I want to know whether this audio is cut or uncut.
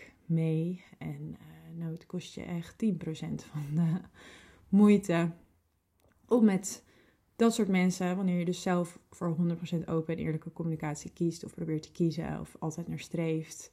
uncut